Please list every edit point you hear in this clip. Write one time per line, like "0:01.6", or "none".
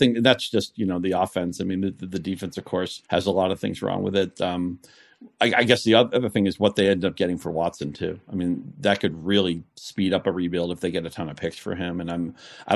0:03.0